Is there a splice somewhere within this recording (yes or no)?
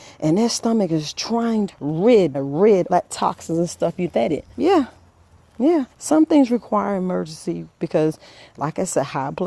yes